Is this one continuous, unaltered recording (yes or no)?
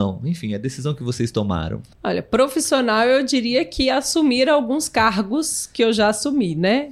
no